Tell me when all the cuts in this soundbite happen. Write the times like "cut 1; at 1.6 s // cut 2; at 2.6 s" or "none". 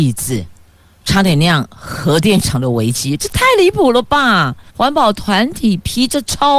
cut 1; at 4.7 s